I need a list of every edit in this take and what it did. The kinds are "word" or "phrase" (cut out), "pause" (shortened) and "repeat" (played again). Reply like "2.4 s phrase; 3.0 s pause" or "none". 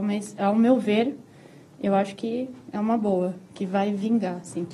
none